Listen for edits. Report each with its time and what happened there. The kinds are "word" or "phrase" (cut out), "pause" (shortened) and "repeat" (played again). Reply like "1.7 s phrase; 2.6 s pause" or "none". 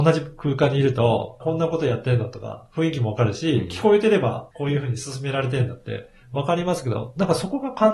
1.4 s word; 4.5 s word